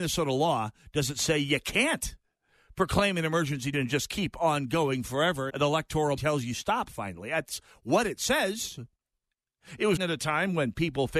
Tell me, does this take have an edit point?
yes; 4 cuts; at 3.7 s, 5.5 s, 6.2 s, 10.0 s

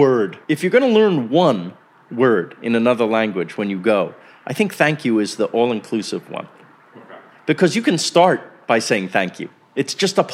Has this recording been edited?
no; 0 cuts

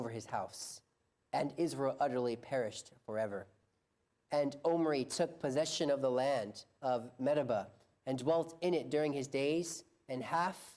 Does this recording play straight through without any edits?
yes; 0 cuts

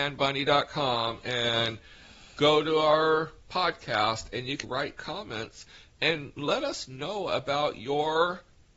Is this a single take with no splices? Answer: no; 1 cut; at 4.6 s

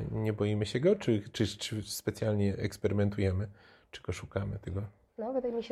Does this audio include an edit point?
no; 0 cuts

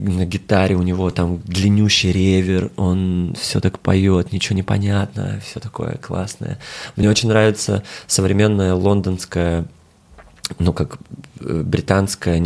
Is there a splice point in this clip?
no; 0 cuts

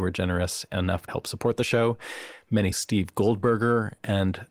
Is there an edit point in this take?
yes; 2 cuts; at 1.1 s, 2.7 s

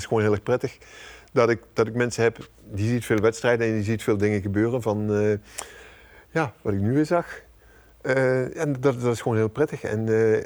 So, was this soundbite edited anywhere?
no; 0 cuts

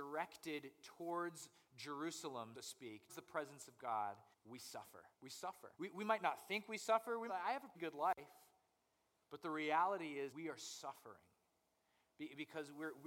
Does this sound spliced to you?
yes; 8 cuts; at 2.5 s, 3.1 s, 4.3 s, 5.1 s, 5.8 s, 7.3 s, 7.7 s, 10.3 s

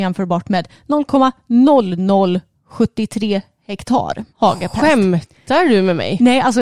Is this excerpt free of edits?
no; 1 cut; at 4.3 s

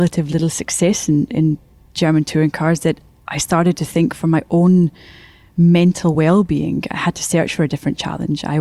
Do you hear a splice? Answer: no; 0 cuts

